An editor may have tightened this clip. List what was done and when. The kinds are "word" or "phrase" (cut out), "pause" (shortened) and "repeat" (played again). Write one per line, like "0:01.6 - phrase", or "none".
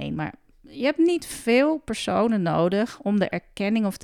none